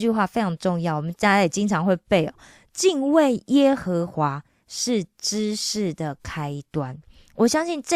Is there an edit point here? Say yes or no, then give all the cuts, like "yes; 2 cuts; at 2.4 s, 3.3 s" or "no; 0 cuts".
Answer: no; 0 cuts